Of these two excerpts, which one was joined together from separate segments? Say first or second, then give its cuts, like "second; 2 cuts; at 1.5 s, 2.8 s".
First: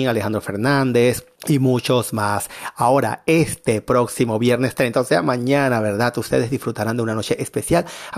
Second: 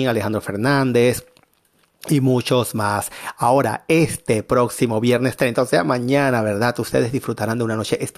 first; 1 cut; at 1.4 s